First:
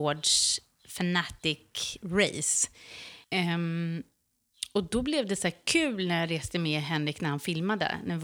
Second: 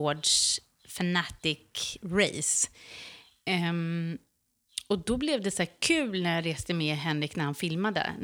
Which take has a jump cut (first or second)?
first